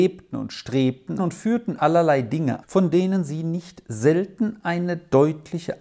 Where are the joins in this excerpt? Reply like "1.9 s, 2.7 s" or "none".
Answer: 1.2 s, 1.8 s, 2.6 s